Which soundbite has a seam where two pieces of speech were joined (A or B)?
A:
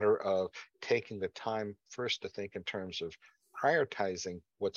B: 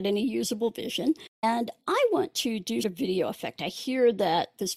B